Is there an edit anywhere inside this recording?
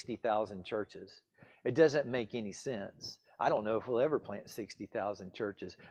no; 0 cuts

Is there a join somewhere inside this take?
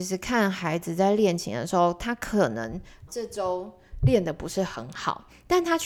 yes; 1 cut; at 3.1 s

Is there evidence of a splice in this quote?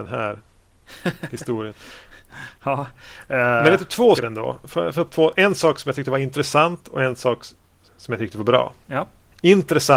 yes; 2 cuts; at 4.2 s, 4.9 s

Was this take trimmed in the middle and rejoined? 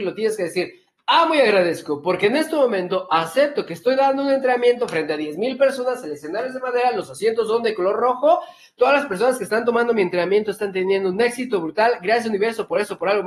no; 0 cuts

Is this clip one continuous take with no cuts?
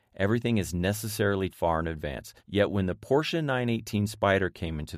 no; 2 cuts; at 1.5 s, 2.4 s

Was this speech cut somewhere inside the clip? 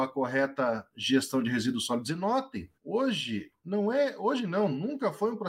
yes; 1 cut; at 2.8 s

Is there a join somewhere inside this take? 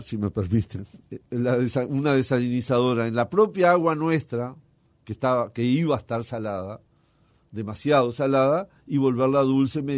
yes; 1 cut; at 1.2 s

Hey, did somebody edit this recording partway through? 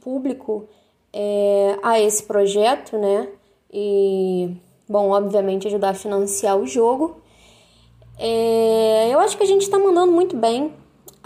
no; 0 cuts

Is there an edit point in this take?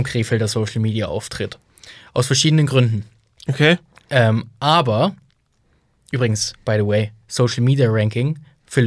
no; 0 cuts

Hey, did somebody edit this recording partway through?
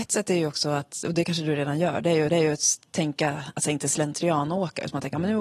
yes; 1 cut; at 2.3 s

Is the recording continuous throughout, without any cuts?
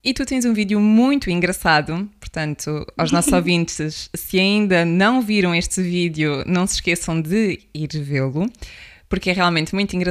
yes; 0 cuts

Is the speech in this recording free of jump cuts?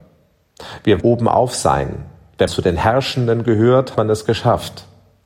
no; 3 cuts; at 1.0 s, 2.5 s, 3.9 s

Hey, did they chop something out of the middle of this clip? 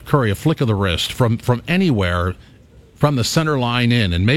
no; 0 cuts

